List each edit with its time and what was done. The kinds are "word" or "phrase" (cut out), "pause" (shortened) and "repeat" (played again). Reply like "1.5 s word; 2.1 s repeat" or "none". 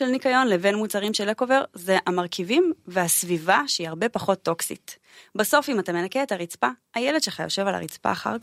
none

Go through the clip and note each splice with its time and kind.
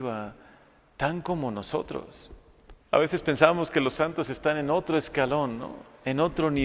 2.8 s pause

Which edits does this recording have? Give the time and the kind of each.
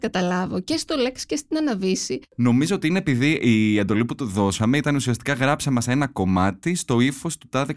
none

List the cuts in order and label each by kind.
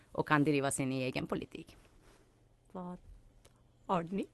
none

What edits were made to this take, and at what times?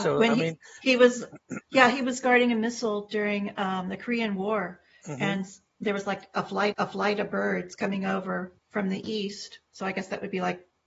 6.7 s repeat; 8.6 s pause

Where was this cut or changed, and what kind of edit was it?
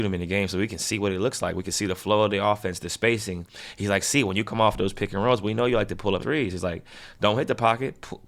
6.2 s phrase

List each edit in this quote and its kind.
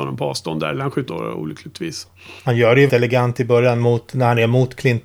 1.1 s word; 2.4 s pause; 2.9 s word

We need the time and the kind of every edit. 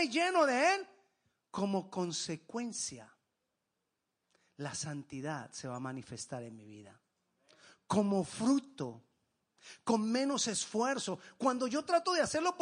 none

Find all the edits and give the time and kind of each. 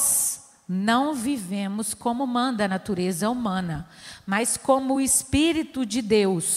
none

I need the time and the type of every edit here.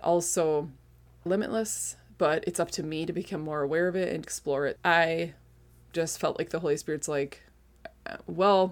1.3 s phrase; 4.2 s word; 4.8 s word

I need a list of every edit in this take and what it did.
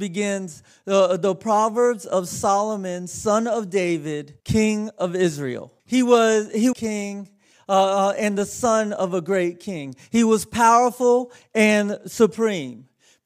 4.4 s pause; 5.8 s pause; 6.7 s phrase

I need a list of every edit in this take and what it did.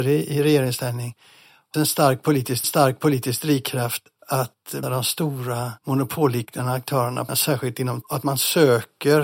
1.7 s word; 2.6 s repeat; 4.8 s word; 5.8 s pause; 7.3 s word; 8.0 s phrase

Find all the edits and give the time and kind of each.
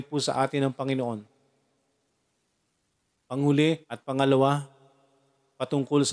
3.8 s pause

